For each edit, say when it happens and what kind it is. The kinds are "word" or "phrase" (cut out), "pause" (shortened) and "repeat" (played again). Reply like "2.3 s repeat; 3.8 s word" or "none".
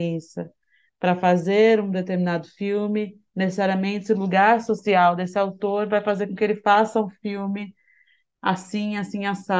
none